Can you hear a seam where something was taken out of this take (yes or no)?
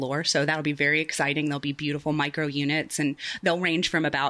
no